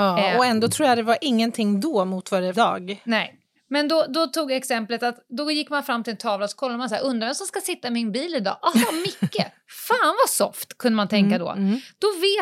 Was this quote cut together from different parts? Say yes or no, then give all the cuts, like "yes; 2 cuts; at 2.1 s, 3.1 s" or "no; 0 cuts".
yes; 2 cuts; at 2.5 s, 3.6 s